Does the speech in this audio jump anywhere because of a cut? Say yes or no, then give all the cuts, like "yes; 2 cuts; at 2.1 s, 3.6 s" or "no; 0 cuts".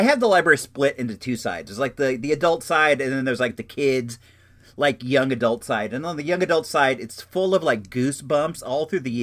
no; 0 cuts